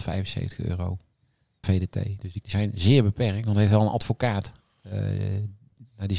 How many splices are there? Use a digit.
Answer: 2